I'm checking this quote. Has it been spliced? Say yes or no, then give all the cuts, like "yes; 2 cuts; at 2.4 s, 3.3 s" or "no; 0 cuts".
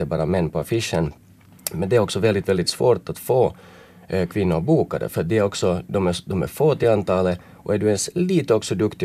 no; 0 cuts